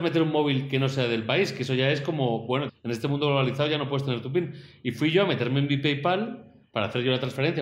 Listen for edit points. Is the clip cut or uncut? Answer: cut